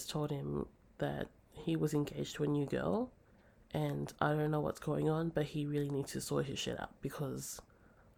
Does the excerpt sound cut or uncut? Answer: uncut